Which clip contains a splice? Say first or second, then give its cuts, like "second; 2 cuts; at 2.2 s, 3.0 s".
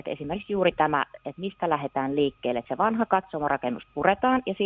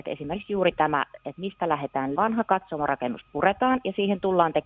second; 1 cut; at 2.1 s